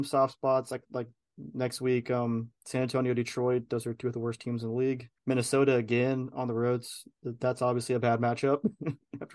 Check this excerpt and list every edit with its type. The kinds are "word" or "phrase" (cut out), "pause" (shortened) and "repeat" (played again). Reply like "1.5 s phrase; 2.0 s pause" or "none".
5.2 s pause

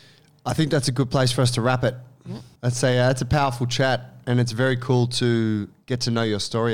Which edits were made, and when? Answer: 2.6 s pause

